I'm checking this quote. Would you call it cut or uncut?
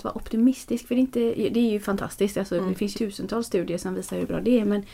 cut